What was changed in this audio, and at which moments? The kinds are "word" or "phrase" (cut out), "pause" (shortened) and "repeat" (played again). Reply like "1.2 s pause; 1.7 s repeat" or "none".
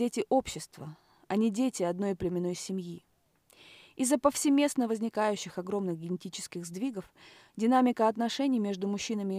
none